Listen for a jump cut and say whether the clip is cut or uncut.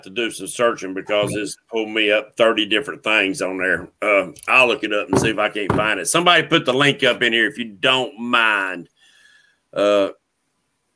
uncut